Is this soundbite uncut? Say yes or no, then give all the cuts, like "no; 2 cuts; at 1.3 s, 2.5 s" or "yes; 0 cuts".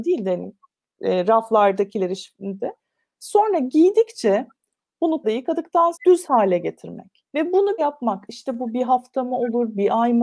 no; 5 cuts; at 2.6 s, 5.2 s, 5.9 s, 7.3 s, 7.8 s